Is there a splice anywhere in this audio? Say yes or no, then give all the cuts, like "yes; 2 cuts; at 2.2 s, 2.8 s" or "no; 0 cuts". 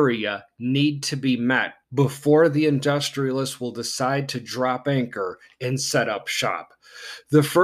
yes; 1 cut; at 1.8 s